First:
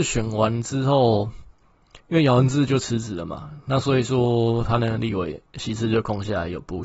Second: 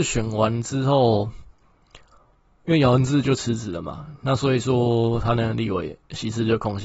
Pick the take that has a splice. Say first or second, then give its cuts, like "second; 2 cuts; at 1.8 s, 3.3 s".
first; 1 cut; at 2.0 s